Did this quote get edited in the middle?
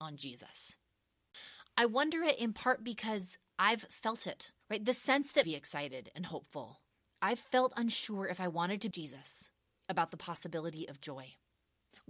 yes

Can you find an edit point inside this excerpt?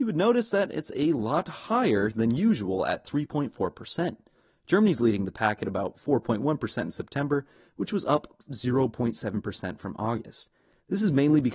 no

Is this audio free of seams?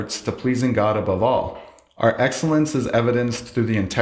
yes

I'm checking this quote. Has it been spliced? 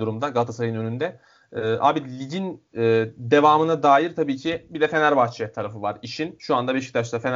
no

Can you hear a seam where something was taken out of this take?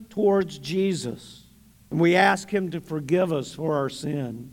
yes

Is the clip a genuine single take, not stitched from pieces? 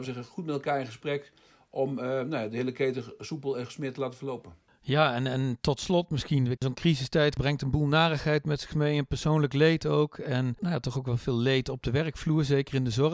yes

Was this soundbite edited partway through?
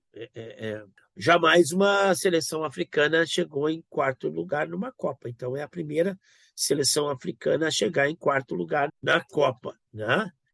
yes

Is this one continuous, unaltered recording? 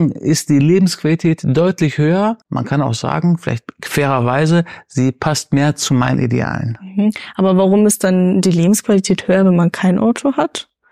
no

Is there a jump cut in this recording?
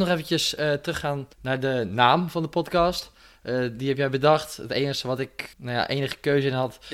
yes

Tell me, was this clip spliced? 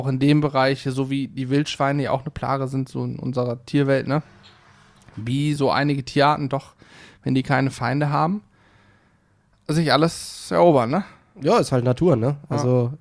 no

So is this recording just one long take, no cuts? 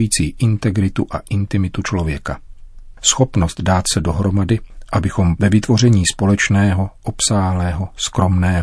no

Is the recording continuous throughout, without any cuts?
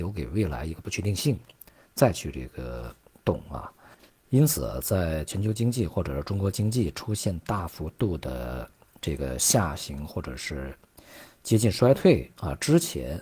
yes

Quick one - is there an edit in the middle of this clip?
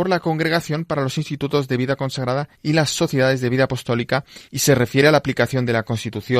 yes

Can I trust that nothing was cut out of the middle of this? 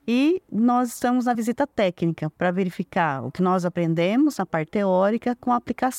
yes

